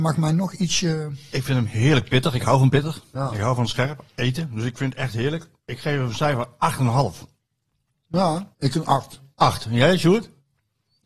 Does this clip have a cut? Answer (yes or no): yes